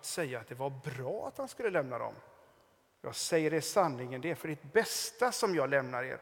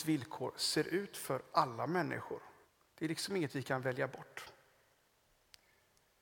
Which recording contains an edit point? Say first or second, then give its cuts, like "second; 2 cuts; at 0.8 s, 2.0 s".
second; 1 cut; at 2.6 s